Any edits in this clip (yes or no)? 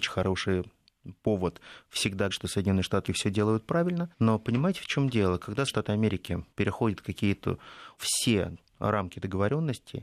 yes